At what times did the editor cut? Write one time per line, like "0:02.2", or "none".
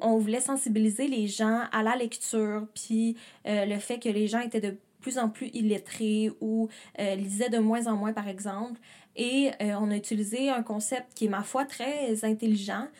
none